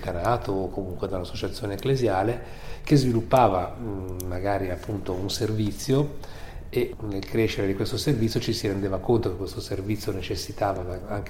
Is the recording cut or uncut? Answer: uncut